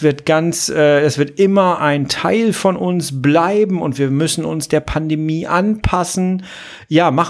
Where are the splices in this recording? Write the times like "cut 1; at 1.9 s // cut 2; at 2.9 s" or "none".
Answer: cut 1; at 1.8 s